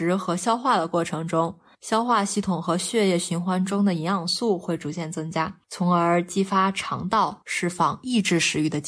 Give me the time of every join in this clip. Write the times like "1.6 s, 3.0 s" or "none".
5.6 s